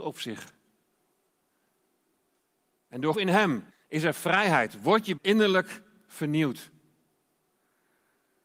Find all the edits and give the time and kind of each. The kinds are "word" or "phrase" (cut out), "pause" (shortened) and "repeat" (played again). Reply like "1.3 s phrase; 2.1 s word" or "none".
3.1 s word; 3.7 s pause; 5.2 s phrase